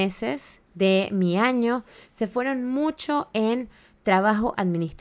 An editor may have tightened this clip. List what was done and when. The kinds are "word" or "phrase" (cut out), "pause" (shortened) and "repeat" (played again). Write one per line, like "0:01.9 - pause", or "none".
none